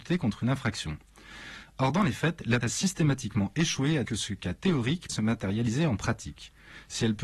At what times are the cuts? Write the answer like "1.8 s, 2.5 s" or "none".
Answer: 2.6 s, 4.0 s, 5.1 s